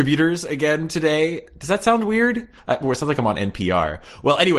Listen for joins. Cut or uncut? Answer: uncut